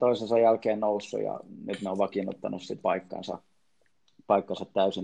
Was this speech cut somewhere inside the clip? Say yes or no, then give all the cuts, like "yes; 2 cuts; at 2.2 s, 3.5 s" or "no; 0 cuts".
yes; 1 cut; at 2.8 s